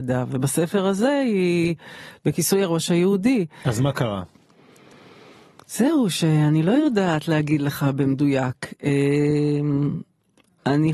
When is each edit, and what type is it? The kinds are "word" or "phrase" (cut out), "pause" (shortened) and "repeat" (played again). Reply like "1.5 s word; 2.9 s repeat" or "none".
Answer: none